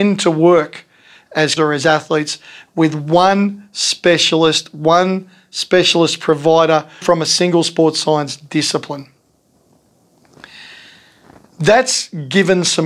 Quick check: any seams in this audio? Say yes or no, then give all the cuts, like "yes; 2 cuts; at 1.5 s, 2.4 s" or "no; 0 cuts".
yes; 2 cuts; at 1.6 s, 7.0 s